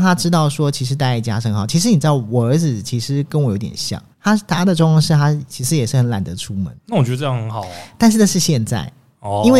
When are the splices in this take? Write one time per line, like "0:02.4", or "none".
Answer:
0:04.1
0:06.8